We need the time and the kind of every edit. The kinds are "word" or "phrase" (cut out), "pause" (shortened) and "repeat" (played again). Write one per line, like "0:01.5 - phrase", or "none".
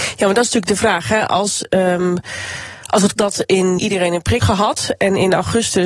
0:03.1 - word
0:03.8 - word
0:04.4 - word

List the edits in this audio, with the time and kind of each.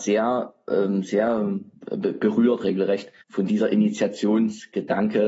0:01.7 - pause
0:03.2 - pause

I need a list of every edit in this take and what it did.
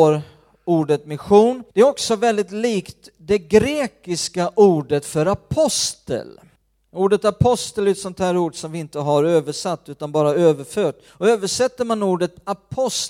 0:01.7 - pause
0:06.6 - pause
0:11.1 - pause

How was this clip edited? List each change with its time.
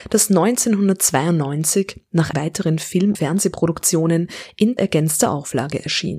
0:02.3 - word
0:03.1 - word
0:04.8 - word

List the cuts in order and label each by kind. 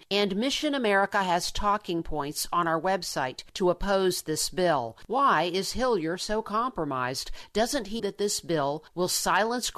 0:08.0 - word

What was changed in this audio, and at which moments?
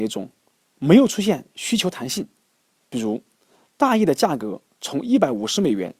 none

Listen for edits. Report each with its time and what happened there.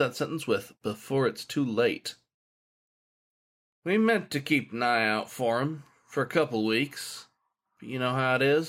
none

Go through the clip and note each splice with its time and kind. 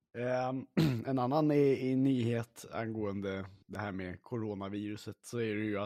0:03.6 - pause

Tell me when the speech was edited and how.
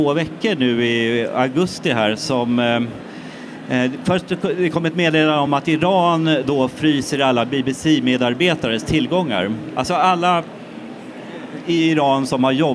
none

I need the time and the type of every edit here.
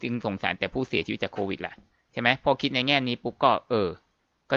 none

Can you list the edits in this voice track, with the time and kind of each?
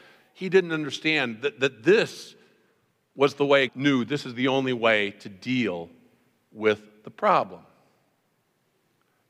0:03.7 - word

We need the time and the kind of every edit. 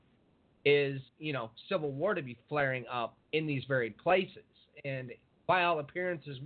0:01.1 - pause
0:03.2 - pause
0:05.3 - pause

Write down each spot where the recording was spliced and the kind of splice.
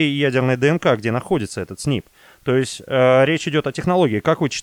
none

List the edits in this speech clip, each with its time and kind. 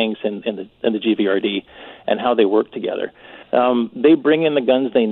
0:03.4 - pause

